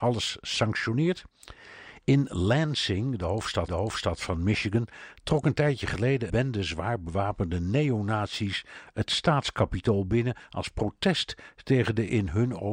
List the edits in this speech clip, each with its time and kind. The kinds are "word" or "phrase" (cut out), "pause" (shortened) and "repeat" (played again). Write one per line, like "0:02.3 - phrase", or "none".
0:03.7 - repeat
0:06.3 - word